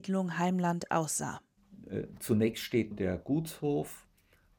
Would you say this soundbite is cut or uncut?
cut